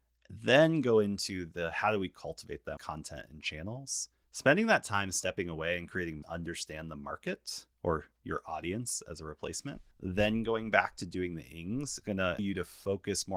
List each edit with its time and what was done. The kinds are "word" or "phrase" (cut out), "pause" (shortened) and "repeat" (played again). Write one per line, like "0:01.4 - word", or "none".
0:02.8 - word
0:04.1 - pause
0:06.2 - phrase
0:07.7 - pause
0:09.9 - pause
0:12.0 - word
0:12.4 - word